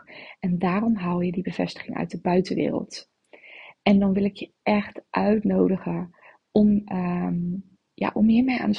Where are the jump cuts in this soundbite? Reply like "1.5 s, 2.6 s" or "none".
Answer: none

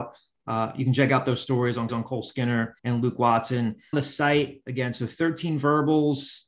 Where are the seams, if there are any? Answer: 1.9 s, 2.8 s, 3.9 s

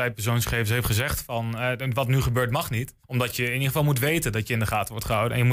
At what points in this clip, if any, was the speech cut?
3.0 s

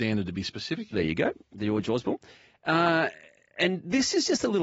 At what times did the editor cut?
none

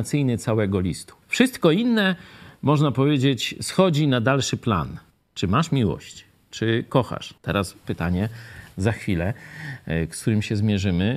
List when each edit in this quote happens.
1.2 s, 5.1 s, 6.4 s, 7.4 s

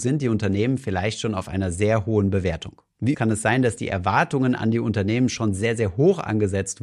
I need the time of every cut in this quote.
3.1 s

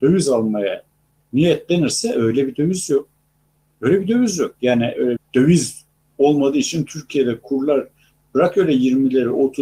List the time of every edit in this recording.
5.2 s

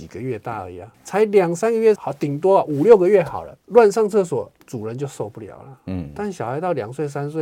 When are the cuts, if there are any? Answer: 0.9 s, 2.0 s, 3.6 s, 4.6 s

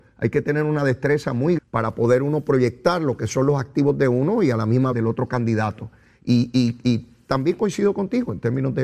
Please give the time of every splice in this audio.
1.6 s, 4.9 s

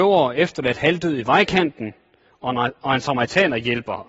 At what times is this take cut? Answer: none

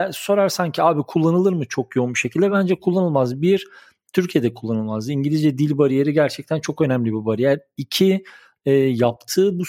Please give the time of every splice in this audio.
none

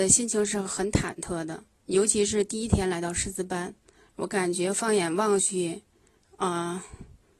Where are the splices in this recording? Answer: 1.8 s

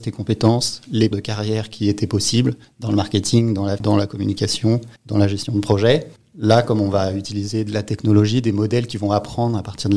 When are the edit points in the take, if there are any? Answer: 1.1 s, 3.8 s, 5.0 s, 6.2 s

